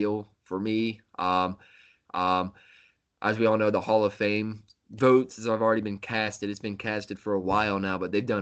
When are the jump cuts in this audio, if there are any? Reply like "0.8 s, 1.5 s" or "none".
2.0 s

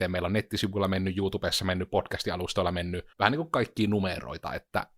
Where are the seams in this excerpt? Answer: 3.1 s

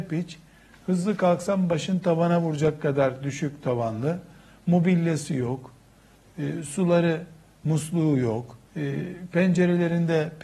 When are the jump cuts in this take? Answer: 8.7 s

